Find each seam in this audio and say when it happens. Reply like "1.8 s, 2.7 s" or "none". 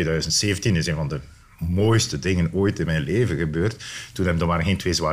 none

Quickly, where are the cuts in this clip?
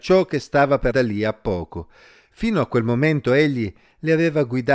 0.9 s

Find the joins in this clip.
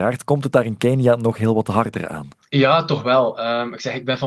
none

